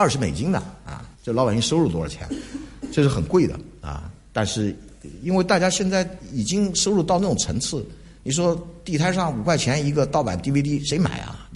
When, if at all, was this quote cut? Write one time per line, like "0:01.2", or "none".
0:01.1